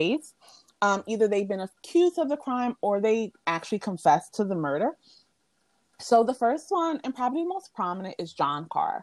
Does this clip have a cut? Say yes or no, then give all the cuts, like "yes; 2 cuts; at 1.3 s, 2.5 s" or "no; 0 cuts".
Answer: no; 0 cuts